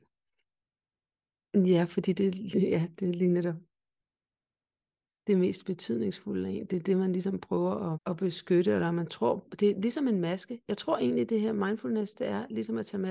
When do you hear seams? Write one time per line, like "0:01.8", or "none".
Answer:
0:07.9